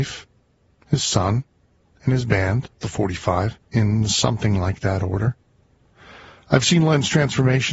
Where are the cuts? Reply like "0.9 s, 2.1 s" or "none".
3.6 s